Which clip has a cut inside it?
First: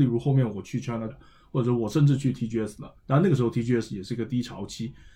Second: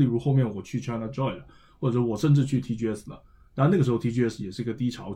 first; 2 cuts; at 1.1 s, 3.0 s

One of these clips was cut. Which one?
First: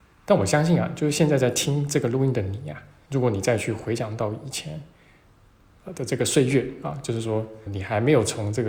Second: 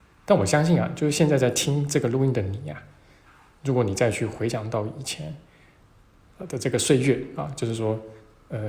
first; 2 cuts; at 3.1 s, 7.7 s

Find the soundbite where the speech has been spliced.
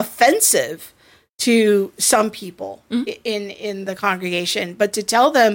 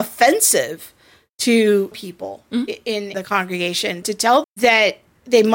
second; 4 cuts; at 1.9 s, 3.1 s, 4.0 s, 4.4 s

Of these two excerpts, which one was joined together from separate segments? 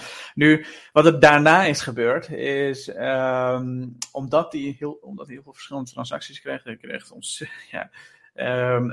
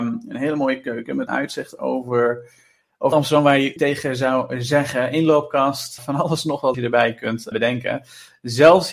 second; 6 cuts; at 1.3 s, 3.1 s, 3.8 s, 6.0 s, 6.7 s, 7.5 s

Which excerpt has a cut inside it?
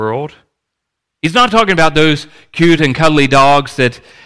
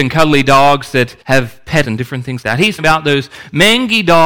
second; 4 cuts; at 1.2 s, 1.8 s, 2.4 s, 2.8 s

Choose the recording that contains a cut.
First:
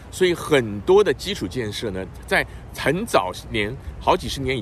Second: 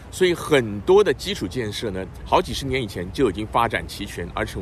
second; 1 cut; at 2.2 s

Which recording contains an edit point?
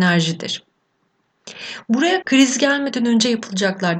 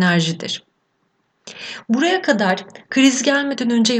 first; 1 cut; at 2.2 s

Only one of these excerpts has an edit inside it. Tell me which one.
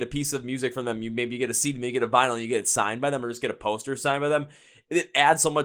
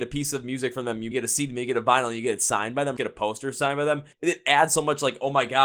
second; 3 cuts; at 1.1 s, 3.0 s, 4.1 s

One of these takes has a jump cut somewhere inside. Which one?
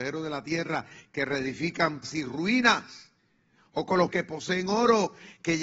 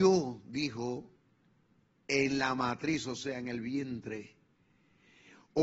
first; 2 cuts; at 2.0 s, 4.1 s

